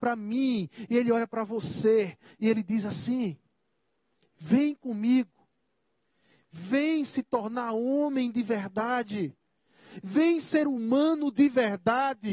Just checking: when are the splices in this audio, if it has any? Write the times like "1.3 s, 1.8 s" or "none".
none